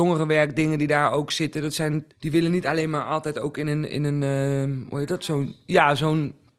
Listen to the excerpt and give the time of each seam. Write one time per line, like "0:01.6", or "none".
0:02.1